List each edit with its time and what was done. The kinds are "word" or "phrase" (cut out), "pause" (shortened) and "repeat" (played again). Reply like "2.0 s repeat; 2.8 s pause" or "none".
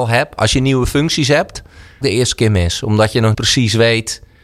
2.0 s phrase; 3.3 s word